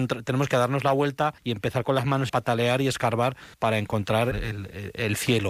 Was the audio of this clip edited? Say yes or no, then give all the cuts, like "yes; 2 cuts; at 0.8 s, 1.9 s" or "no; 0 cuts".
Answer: yes; 4 cuts; at 1.4 s, 2.3 s, 3.5 s, 4.3 s